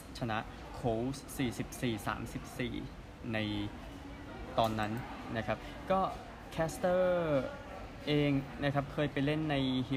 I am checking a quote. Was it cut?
no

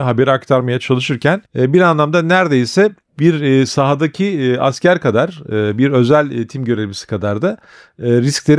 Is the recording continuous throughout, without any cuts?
no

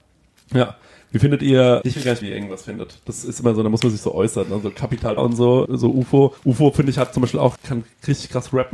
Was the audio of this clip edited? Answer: yes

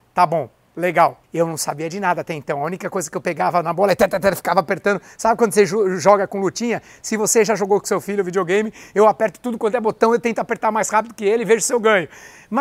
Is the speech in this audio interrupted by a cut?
yes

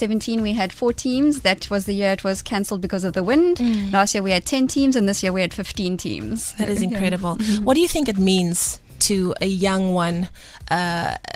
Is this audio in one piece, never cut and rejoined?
yes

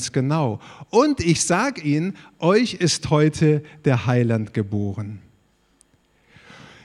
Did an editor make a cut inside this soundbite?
no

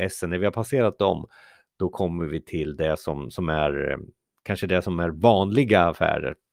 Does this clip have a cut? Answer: no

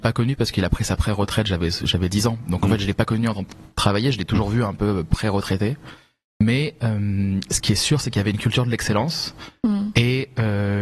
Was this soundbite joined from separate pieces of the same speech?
no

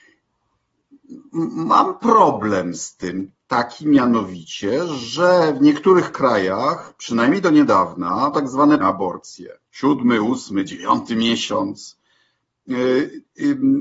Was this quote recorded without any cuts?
no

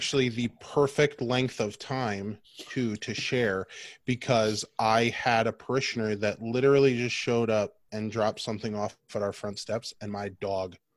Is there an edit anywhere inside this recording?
yes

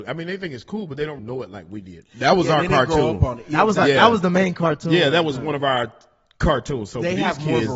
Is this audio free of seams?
no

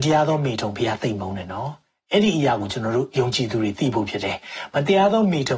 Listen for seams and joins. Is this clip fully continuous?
yes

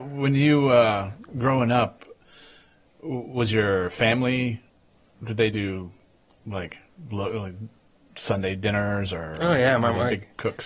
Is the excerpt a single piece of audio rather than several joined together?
yes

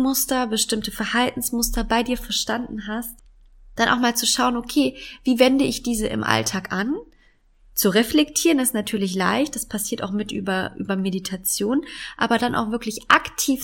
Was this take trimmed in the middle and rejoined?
no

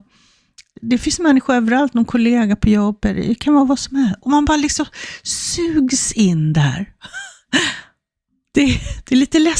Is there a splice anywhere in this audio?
no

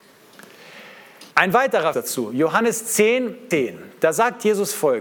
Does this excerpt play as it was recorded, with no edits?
no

